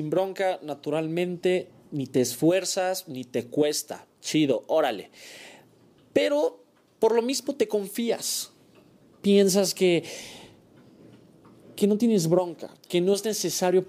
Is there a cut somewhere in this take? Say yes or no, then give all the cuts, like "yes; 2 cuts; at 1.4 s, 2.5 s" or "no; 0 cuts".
no; 0 cuts